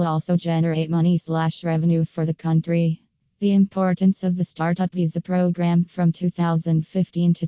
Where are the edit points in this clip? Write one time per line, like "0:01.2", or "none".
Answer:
none